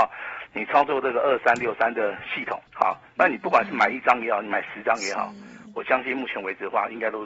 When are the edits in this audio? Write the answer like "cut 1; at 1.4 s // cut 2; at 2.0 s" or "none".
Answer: cut 1; at 2.7 s